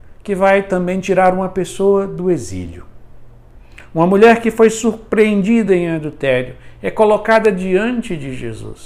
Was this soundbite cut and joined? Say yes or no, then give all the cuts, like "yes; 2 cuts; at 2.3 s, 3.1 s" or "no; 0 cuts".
no; 0 cuts